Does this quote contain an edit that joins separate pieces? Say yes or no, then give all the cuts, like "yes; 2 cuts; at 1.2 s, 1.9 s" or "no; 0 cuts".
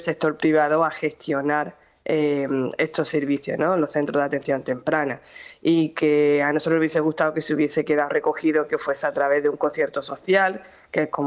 no; 0 cuts